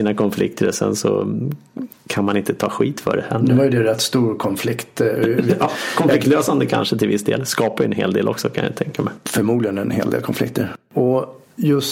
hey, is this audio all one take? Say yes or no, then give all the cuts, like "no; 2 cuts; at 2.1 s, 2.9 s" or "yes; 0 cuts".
yes; 0 cuts